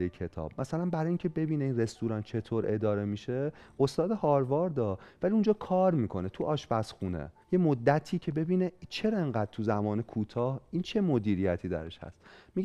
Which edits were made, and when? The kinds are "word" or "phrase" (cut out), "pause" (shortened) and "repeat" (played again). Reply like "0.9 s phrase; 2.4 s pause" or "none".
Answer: 7.4 s pause